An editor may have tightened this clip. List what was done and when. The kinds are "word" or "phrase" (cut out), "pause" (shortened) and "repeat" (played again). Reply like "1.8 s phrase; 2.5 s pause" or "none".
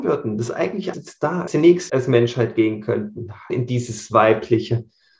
0.9 s word; 1.5 s phrase; 1.9 s word; 3.5 s word